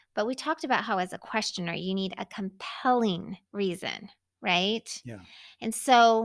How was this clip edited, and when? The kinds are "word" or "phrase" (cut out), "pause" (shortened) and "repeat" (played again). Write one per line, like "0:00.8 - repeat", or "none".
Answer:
0:03.4 - pause